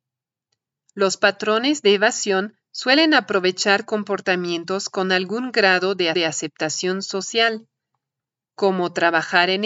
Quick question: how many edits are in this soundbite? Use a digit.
1